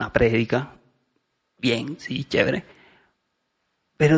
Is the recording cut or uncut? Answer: uncut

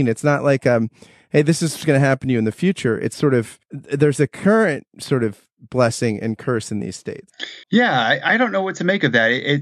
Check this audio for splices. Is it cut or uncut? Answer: cut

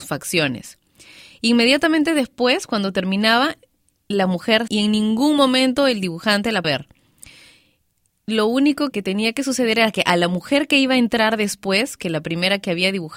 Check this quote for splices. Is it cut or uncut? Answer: cut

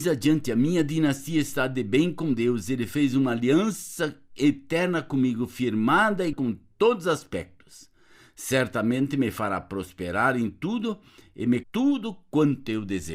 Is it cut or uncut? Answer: cut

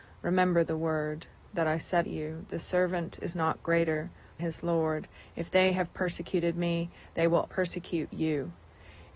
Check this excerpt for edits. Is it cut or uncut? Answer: cut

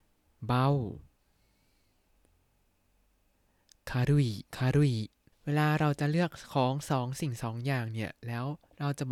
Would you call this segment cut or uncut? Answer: cut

